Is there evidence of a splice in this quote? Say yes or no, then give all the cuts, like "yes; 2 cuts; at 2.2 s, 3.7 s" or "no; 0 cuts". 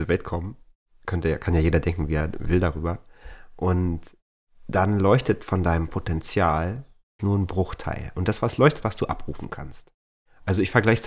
yes; 3 cuts; at 4.4 s, 7.2 s, 8.8 s